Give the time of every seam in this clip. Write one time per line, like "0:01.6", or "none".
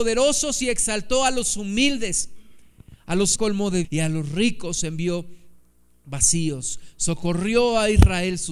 0:03.4
0:03.8